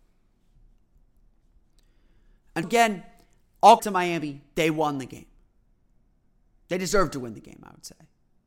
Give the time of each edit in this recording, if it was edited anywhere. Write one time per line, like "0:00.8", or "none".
0:02.6
0:03.8